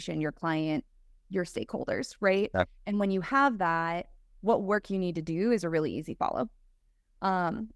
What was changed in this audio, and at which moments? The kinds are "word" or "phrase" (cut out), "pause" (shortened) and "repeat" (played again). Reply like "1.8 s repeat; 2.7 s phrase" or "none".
none